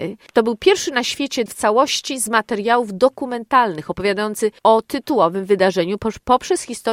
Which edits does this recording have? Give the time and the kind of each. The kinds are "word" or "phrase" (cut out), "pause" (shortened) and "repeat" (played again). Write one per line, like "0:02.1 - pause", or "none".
0:01.5 - phrase